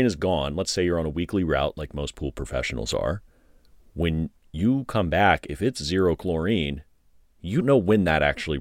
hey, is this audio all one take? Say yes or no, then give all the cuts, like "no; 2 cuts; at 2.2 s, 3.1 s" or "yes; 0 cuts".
no; 1 cut; at 7.6 s